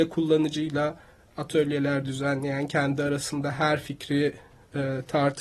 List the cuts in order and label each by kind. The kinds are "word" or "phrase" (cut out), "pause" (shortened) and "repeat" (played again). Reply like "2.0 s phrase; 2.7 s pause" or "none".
none